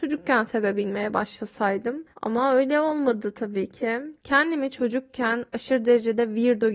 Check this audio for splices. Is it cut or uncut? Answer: cut